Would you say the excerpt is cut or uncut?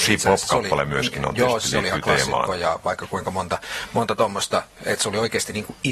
uncut